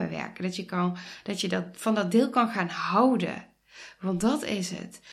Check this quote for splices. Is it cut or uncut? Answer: uncut